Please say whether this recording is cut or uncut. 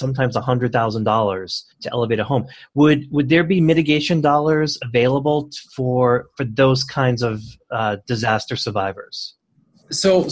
cut